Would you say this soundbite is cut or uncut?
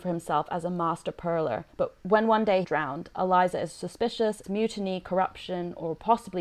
cut